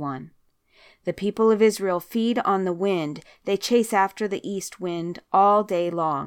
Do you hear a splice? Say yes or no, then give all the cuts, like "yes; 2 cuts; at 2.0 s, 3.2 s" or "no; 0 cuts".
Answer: no; 0 cuts